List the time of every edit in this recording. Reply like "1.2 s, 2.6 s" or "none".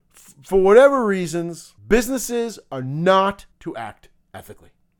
1.8 s, 3.5 s